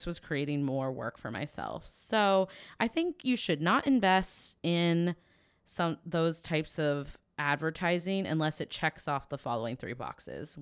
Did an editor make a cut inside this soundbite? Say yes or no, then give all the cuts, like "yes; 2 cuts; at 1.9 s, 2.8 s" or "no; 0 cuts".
no; 0 cuts